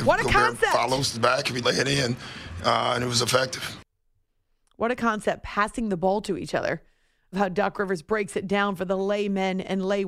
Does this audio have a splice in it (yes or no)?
yes